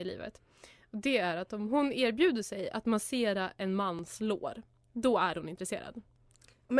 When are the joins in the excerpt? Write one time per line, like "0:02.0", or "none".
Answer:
none